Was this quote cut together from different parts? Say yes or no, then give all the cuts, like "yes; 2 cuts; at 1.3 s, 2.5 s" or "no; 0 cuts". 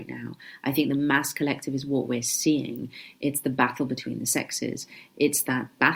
no; 0 cuts